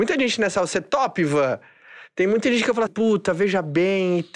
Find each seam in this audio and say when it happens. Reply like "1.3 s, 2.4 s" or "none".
2.9 s